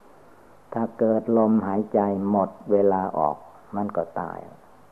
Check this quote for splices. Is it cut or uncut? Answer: uncut